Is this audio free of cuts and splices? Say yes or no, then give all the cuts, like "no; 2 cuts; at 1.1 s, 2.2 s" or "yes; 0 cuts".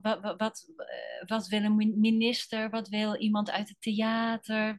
yes; 0 cuts